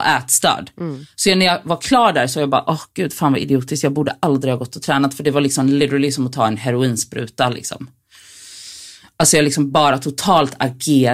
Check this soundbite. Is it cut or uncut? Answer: uncut